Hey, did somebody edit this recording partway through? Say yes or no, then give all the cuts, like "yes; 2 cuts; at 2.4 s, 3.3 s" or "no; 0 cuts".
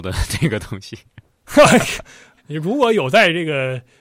yes; 1 cut; at 2.4 s